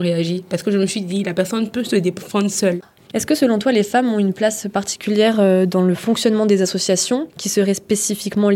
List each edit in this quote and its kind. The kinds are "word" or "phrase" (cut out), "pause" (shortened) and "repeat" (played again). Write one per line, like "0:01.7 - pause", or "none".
none